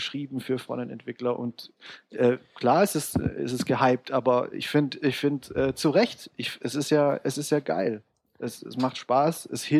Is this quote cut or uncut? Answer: uncut